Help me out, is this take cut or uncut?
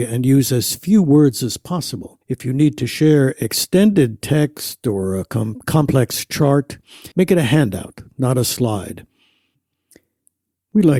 cut